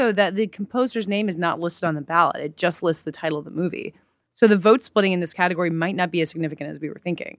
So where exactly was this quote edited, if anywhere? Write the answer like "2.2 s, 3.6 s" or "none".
none

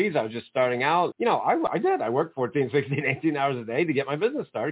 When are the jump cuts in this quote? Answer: 1.1 s

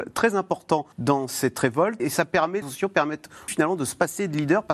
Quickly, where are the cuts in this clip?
0.9 s, 2.0 s, 2.6 s, 3.5 s

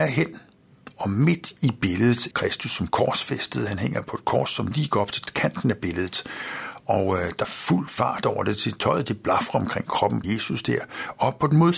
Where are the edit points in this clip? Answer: 2.3 s, 7.4 s, 10.2 s

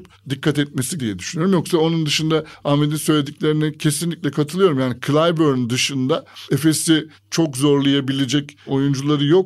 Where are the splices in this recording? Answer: 1.0 s

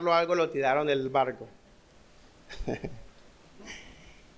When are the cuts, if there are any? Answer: none

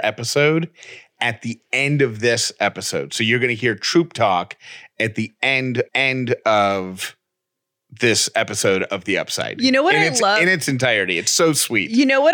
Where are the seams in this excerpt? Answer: 5.9 s

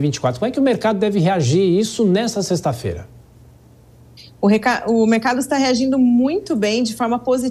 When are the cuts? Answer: none

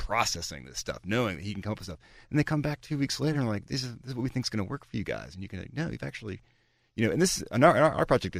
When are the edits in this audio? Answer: none

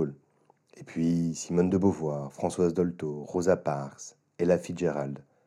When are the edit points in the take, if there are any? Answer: none

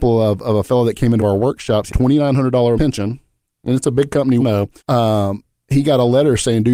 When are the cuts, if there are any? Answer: 1.2 s, 1.9 s, 2.8 s, 4.4 s, 4.8 s

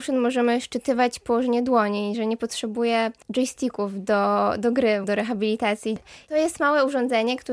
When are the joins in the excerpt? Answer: 3.2 s, 5.0 s

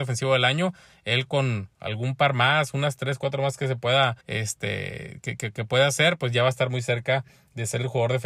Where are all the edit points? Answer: 4.2 s

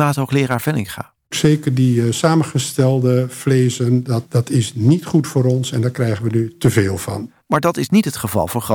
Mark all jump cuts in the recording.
4.3 s, 7.4 s

